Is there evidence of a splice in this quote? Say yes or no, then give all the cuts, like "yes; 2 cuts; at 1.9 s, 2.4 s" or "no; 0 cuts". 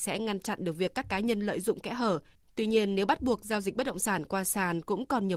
no; 0 cuts